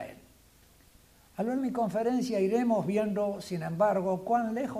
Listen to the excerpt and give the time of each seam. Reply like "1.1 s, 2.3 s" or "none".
1.6 s